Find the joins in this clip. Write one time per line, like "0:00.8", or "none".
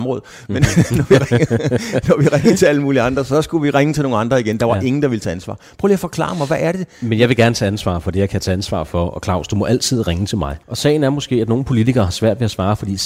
0:10.6